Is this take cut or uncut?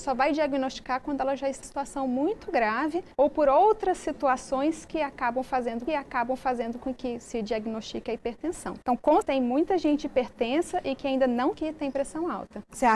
cut